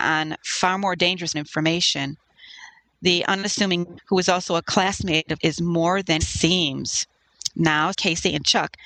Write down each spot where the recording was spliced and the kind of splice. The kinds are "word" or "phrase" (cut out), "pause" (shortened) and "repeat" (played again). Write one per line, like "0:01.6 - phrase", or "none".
0:01.3 - word
0:04.0 - word
0:05.4 - word
0:06.2 - word
0:07.9 - word